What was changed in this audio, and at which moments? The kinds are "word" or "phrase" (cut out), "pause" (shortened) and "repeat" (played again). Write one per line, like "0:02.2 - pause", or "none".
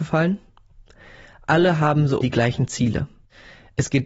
0:02.2 - word